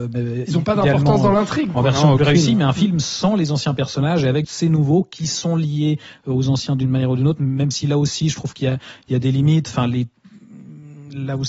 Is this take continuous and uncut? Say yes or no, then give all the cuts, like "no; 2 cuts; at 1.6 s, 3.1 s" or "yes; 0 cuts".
no; 1 cut; at 4.4 s